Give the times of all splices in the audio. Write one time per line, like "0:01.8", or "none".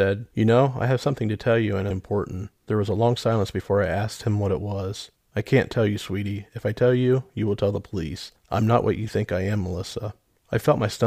0:01.9
0:02.6
0:05.2